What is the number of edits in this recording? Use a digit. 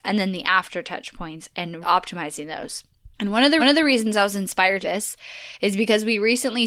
4